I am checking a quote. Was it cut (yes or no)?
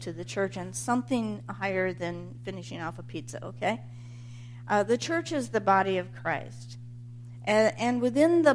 no